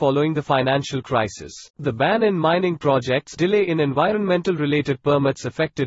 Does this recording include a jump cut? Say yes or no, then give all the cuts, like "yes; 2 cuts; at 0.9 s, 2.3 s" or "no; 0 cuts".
yes; 2 cuts; at 1.7 s, 3.4 s